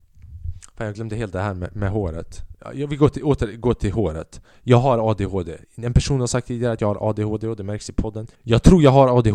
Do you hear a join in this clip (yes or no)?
yes